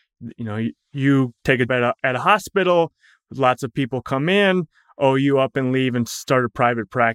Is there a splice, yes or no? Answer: yes